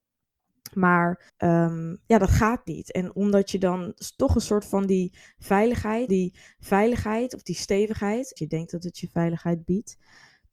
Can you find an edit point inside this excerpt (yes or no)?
yes